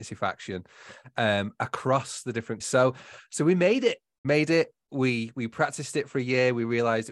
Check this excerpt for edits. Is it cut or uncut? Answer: cut